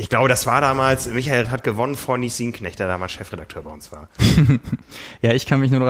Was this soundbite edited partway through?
yes; 1 cut; at 1.4 s

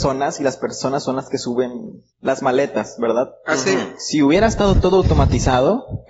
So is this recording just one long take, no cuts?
no; 1 cut; at 2.1 s

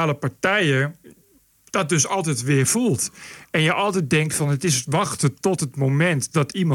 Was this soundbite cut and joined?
no; 0 cuts

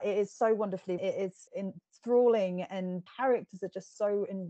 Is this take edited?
yes; 3 cuts; at 1.0 s, 1.5 s, 3.1 s

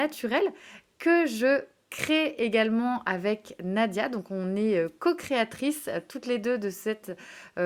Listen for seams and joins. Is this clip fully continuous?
yes; 0 cuts

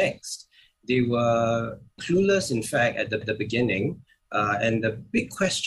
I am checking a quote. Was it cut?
yes; 2 cuts; at 2.0 s, 3.2 s

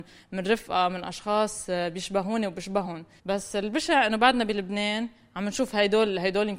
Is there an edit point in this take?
yes; 1 cut; at 3.2 s

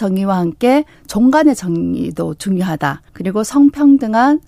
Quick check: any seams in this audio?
yes; 1 cut; at 3.1 s

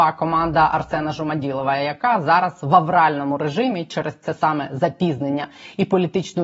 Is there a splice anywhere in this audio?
no; 0 cuts

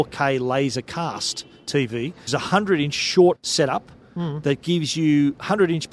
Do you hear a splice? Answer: yes; 2 cuts; at 2.3 s, 3.3 s

